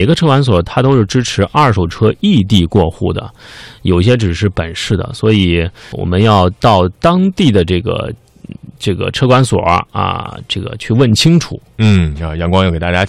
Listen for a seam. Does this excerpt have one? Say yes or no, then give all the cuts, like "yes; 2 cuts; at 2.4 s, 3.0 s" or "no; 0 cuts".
yes; 1 cut; at 5.9 s